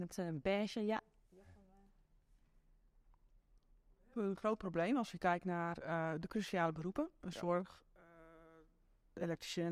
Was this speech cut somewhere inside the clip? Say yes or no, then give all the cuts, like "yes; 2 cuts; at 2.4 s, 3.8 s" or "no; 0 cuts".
no; 0 cuts